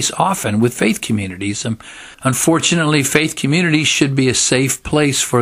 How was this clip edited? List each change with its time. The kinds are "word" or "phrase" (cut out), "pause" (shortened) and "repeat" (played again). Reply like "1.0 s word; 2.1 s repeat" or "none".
2.1 s pause